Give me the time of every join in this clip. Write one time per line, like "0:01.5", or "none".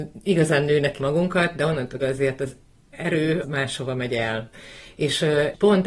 0:01.0
0:02.0
0:03.4